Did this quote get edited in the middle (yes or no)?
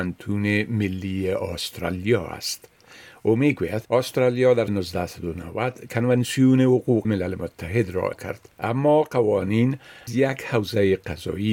yes